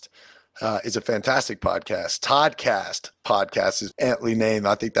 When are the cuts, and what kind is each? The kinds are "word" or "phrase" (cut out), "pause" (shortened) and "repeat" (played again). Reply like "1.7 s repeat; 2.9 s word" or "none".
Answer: 3.9 s word